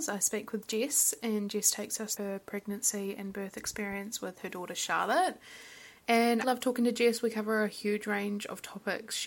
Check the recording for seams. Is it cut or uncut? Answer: cut